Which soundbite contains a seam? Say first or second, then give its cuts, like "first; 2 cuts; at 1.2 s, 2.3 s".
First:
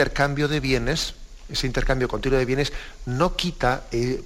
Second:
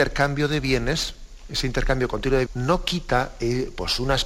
second; 1 cut; at 2.5 s